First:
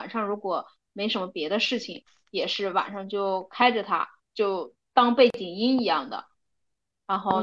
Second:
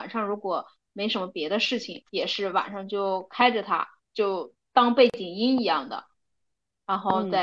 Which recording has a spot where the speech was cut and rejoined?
second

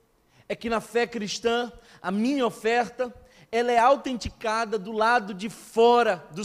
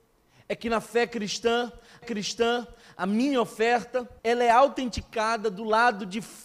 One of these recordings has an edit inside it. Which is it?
second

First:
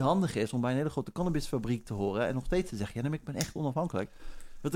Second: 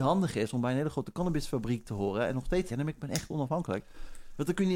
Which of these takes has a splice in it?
second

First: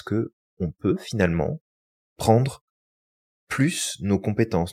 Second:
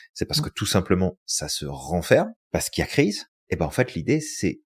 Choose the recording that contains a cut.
second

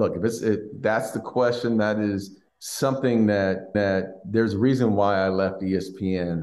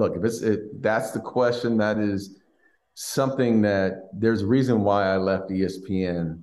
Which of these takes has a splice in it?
first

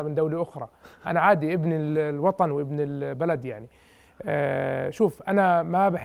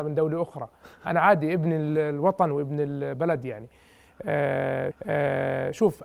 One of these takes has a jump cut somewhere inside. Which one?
second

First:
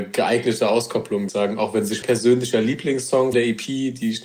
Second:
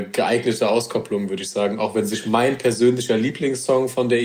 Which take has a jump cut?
first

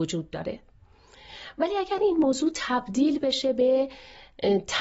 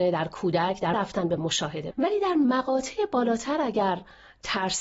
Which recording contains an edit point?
second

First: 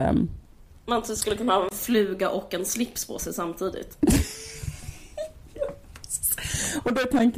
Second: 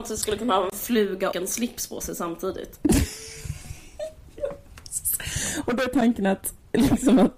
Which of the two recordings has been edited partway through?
second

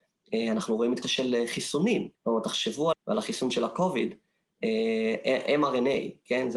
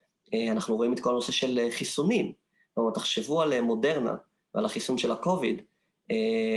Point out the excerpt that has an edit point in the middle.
first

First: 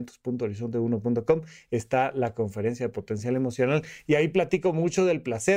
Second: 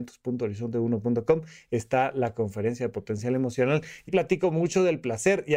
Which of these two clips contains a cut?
second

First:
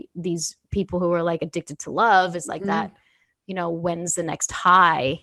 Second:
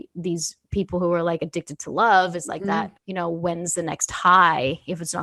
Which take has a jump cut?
second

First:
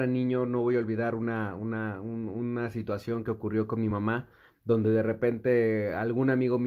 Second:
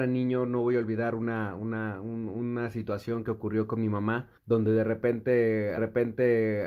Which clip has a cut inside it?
second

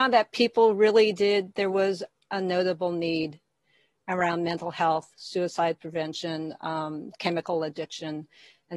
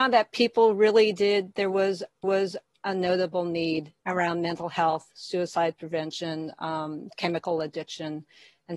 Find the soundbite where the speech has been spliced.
second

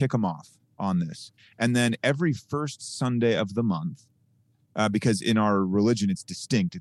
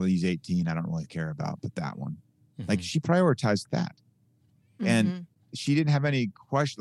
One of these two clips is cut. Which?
second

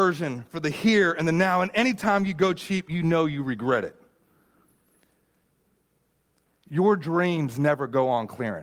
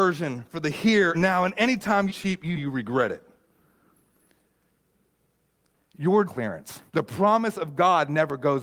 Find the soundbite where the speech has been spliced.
second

